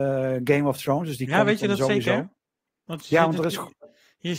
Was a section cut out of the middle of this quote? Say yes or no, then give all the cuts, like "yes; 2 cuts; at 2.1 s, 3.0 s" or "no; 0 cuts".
no; 0 cuts